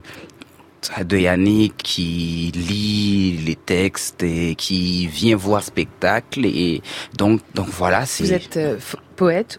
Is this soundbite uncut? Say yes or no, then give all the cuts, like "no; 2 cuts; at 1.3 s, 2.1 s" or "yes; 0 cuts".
no; 4 cuts; at 1.8 s, 5.6 s, 7.4 s, 8.2 s